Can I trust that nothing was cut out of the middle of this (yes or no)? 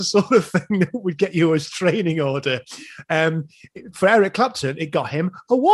yes